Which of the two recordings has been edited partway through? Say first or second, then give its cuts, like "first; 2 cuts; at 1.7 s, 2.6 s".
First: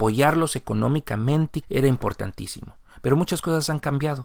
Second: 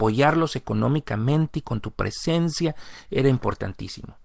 first; 1 cut; at 1.6 s